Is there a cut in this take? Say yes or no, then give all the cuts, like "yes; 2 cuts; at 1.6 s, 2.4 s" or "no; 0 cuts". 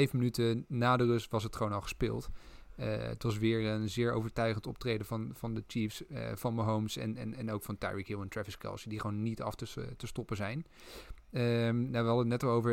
no; 0 cuts